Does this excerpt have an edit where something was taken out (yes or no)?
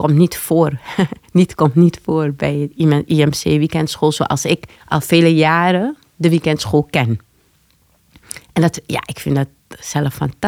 yes